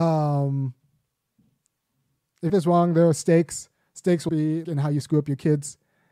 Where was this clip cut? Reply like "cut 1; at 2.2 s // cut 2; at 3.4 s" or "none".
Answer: cut 1; at 2.5 s // cut 2; at 4.3 s // cut 3; at 4.6 s